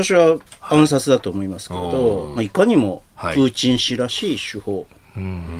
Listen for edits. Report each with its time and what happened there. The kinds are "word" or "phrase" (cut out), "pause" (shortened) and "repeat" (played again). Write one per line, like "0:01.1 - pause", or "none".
0:02.4 - phrase